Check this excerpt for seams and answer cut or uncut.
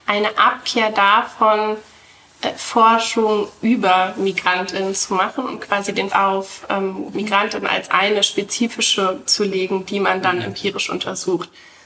cut